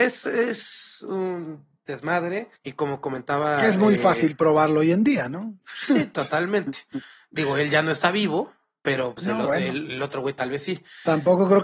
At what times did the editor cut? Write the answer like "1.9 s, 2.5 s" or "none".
2.6 s, 5.6 s